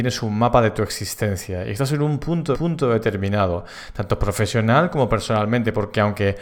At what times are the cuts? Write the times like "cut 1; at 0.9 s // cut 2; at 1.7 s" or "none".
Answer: cut 1; at 2.5 s